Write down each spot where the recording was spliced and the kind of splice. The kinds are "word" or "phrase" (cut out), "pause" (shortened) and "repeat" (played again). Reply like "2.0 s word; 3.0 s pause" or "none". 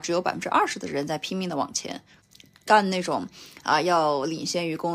none